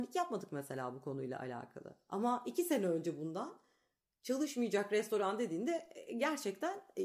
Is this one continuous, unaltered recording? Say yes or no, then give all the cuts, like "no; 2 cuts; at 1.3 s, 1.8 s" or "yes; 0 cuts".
yes; 0 cuts